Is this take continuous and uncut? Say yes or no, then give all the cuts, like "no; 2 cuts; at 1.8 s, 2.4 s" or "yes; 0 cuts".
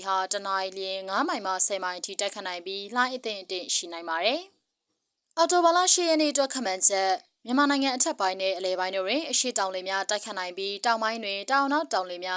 yes; 0 cuts